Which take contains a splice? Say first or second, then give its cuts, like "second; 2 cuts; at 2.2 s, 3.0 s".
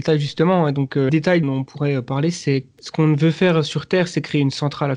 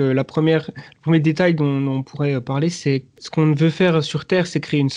first; 2 cuts; at 1.1 s, 1.4 s